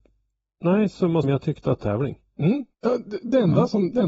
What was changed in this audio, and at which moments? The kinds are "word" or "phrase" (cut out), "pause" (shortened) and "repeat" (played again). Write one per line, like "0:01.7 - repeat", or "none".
0:01.2 - word
0:01.8 - phrase
0:02.7 - pause